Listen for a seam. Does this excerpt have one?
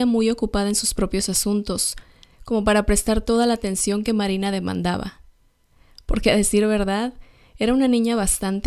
no; 0 cuts

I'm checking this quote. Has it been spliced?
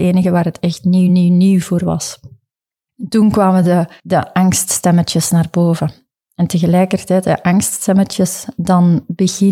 no; 0 cuts

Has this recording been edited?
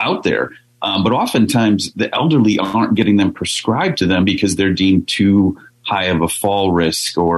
no; 0 cuts

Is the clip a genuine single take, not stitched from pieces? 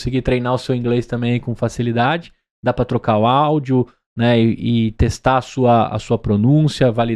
yes; 0 cuts

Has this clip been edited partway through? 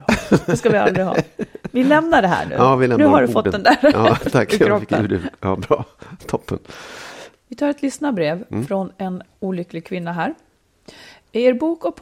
no; 0 cuts

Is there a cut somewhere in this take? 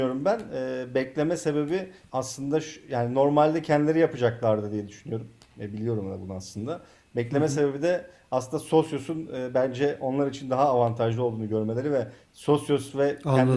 no; 0 cuts

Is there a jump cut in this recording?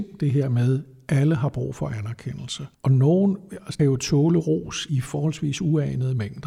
yes; 3 cuts; at 2.7 s, 3.8 s, 4.9 s

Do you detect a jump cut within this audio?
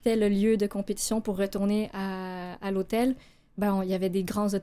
no; 0 cuts

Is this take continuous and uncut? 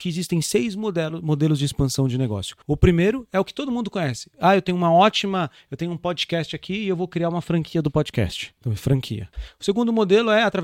no; 1 cut; at 2.6 s

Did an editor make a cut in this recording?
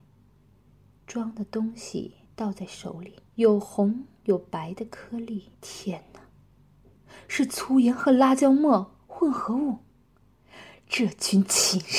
yes; 3 cuts; at 2.3 s, 3.3 s, 5.5 s

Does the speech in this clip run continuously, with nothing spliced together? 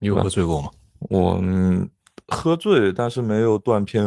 yes; 0 cuts

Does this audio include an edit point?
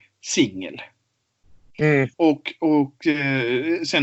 yes; 1 cut; at 2.1 s

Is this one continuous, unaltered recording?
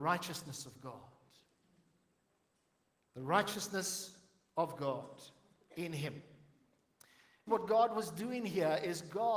no; 1 cut; at 7.5 s

